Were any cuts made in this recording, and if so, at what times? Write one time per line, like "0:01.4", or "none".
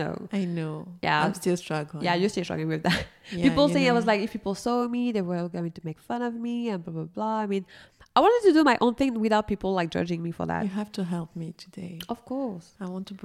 none